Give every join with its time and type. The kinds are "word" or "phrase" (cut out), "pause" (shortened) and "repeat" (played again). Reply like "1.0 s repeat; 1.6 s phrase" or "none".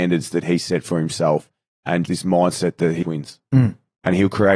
2.1 s word; 3.0 s word